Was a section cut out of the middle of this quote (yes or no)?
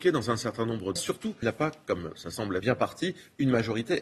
yes